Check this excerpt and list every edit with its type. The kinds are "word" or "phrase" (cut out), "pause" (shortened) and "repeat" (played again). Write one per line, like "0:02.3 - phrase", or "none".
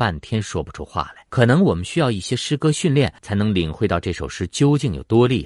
0:01.3 - pause
0:03.2 - pause